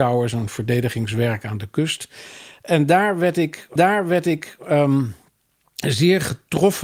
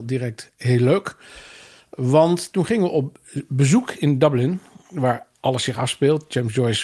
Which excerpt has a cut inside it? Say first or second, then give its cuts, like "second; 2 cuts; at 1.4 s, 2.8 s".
first; 1 cut; at 3.8 s